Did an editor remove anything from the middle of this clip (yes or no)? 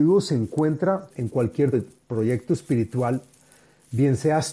yes